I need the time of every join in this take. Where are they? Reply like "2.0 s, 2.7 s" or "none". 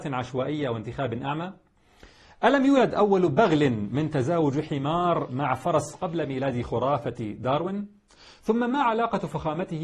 none